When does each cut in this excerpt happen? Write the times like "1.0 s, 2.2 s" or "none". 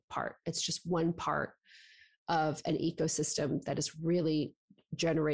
none